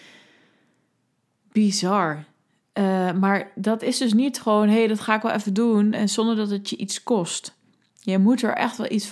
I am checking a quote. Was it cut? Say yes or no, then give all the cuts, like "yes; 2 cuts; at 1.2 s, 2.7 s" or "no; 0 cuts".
no; 0 cuts